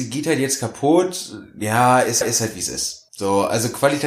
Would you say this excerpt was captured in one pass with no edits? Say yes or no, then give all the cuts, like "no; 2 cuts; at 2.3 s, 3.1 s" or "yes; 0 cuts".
no; 2 cuts; at 2.2 s, 3.1 s